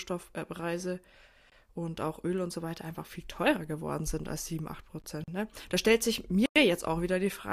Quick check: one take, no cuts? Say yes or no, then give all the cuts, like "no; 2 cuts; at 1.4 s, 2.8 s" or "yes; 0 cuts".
yes; 0 cuts